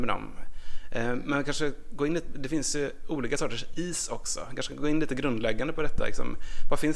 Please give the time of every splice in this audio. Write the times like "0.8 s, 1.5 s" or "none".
none